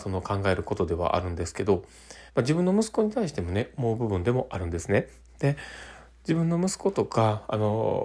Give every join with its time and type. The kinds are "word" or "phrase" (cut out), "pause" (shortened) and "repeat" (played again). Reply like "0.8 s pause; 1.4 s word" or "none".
2.3 s pause